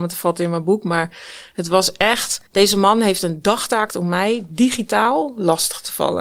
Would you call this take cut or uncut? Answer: cut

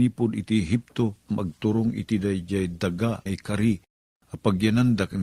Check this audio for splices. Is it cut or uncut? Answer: cut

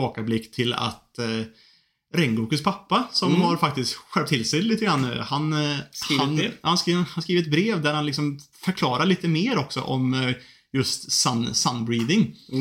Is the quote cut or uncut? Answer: uncut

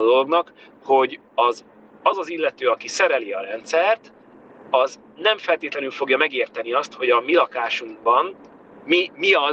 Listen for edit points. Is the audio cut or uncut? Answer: uncut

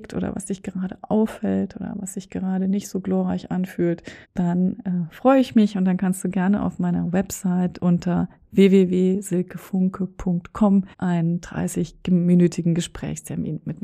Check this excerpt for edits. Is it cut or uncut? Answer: cut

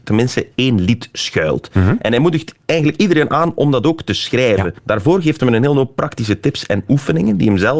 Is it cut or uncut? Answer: cut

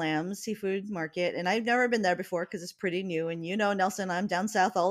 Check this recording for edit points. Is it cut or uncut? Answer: uncut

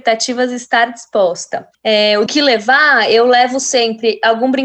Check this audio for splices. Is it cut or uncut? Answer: cut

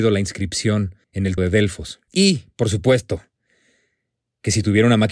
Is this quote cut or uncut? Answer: cut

